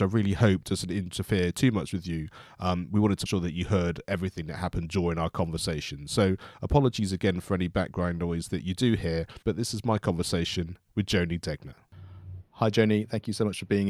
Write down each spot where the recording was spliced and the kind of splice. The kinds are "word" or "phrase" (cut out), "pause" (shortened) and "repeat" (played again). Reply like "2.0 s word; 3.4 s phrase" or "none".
3.3 s word; 9.4 s pause; 12.5 s pause